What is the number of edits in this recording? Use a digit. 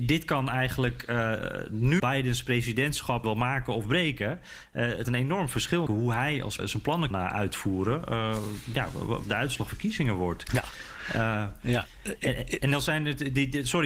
8